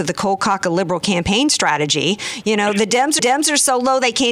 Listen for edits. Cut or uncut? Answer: cut